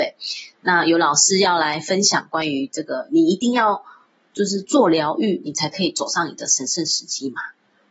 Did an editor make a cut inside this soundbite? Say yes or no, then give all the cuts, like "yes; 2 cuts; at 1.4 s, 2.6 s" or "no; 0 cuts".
no; 0 cuts